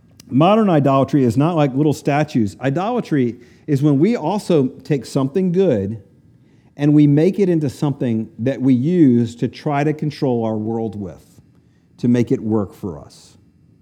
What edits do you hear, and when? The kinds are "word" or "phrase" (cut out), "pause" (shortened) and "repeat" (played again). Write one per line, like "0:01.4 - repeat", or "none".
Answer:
none